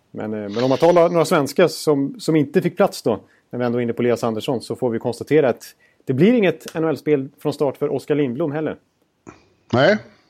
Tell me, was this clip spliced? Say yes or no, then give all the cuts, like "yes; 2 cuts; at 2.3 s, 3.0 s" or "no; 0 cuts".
no; 0 cuts